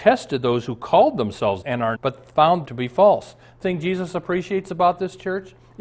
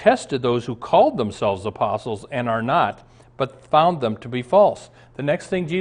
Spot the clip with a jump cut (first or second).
first